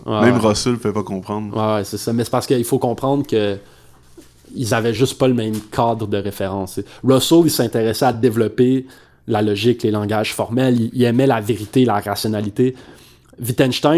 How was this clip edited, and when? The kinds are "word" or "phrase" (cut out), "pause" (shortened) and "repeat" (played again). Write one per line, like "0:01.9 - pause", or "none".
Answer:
none

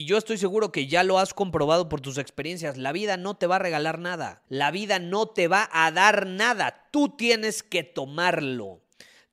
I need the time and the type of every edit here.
0:04.4 - pause

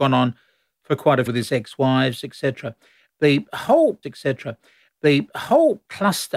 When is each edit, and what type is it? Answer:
0:01.3 - phrase
0:04.0 - repeat

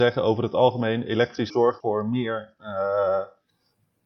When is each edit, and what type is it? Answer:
0:01.5 - word
0:01.8 - word

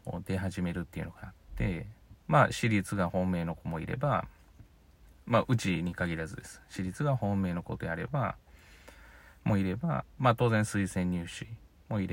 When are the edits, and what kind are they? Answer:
0:02.2 - pause

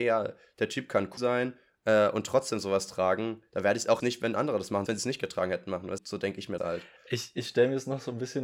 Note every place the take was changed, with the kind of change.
0:01.2 - word
0:04.0 - word
0:04.9 - word
0:06.0 - word
0:06.6 - word

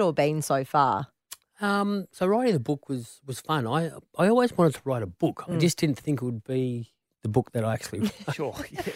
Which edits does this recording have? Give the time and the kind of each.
none

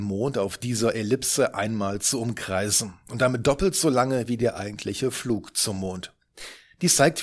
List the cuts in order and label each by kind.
none

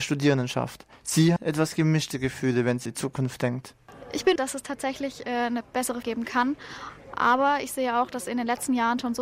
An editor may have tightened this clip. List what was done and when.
0:01.4 - word
0:02.9 - word
0:04.4 - word
0:06.0 - word

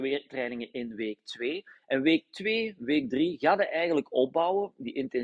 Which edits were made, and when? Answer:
none

